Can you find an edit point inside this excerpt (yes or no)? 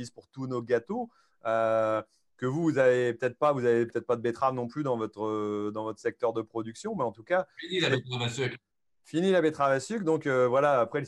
no